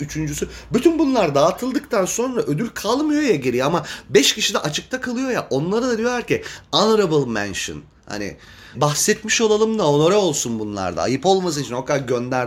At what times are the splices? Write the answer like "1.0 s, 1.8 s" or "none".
8.7 s